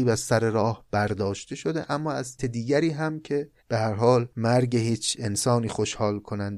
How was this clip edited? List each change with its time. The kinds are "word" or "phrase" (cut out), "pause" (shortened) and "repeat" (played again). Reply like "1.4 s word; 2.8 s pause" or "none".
2.4 s word; 3.6 s pause